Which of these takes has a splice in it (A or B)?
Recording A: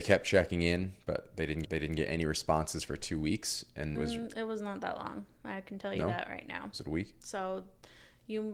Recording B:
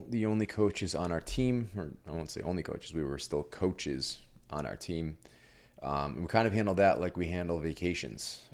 A